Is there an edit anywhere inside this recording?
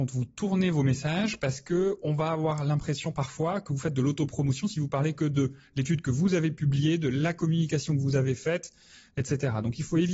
no; 0 cuts

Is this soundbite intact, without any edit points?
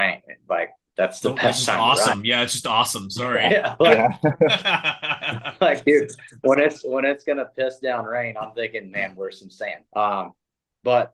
no; 1 cut; at 9.9 s

